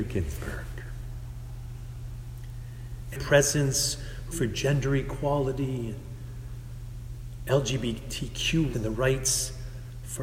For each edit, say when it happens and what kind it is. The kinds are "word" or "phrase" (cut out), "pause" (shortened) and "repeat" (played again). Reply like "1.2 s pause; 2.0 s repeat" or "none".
3.1 s word; 4.3 s word; 8.7 s word